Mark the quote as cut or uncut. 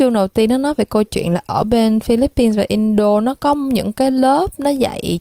uncut